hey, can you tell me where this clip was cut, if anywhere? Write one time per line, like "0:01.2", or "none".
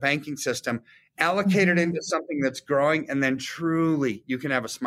none

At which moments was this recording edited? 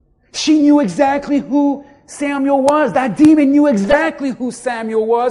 none

